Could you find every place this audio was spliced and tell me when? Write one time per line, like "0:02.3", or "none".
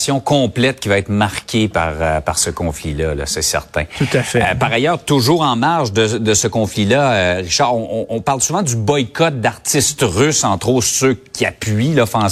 none